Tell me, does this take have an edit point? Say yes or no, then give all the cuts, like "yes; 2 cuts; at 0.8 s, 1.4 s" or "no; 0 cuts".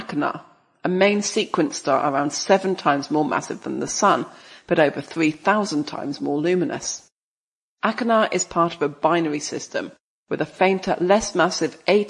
no; 0 cuts